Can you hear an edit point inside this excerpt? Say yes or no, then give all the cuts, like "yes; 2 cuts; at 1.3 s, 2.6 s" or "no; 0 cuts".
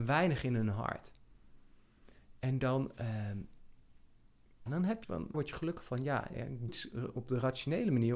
yes; 5 cuts; at 4.7 s, 5.0 s, 5.3 s, 6.3 s, 6.7 s